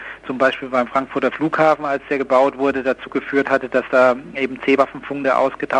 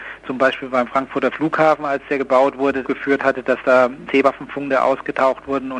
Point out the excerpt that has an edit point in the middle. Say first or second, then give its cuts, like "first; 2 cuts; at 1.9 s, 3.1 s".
second; 2 cuts; at 2.8 s, 4.1 s